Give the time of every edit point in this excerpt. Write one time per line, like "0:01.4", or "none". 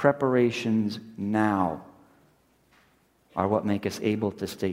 none